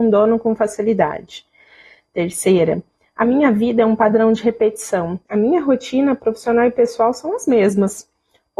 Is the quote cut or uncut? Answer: uncut